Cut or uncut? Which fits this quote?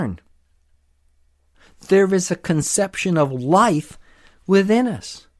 uncut